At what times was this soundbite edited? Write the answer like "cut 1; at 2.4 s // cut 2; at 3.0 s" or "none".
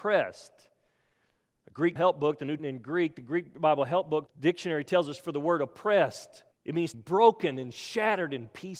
cut 1; at 2.0 s // cut 2; at 2.6 s // cut 3; at 4.3 s // cut 4; at 6.5 s // cut 5; at 6.9 s